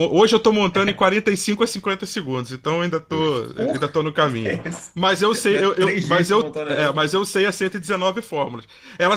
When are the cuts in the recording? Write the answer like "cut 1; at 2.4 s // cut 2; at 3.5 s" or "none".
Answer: none